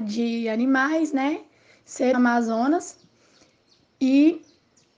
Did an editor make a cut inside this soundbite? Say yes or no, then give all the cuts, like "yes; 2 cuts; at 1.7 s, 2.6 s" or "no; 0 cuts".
yes; 1 cut; at 2.1 s